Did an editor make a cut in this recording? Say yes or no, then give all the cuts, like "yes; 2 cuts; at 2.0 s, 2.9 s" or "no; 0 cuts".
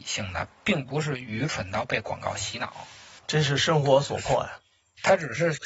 yes; 1 cut; at 3.2 s